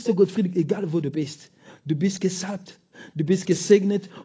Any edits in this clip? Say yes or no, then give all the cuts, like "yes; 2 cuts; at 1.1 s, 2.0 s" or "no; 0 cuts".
no; 0 cuts